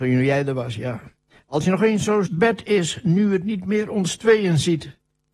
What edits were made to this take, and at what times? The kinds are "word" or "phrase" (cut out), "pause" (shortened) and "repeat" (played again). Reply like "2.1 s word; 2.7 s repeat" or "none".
2.3 s phrase

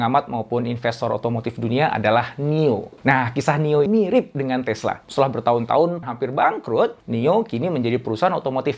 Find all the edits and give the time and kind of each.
3.0 s pause; 3.9 s word; 5.0 s pause; 6.0 s phrase; 7.0 s pause

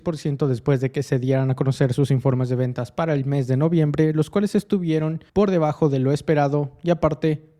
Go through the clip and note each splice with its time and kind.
5.3 s pause

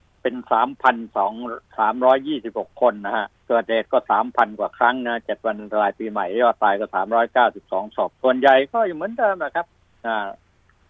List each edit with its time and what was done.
3.3 s pause; 8.1 s pause; 9.8 s pause

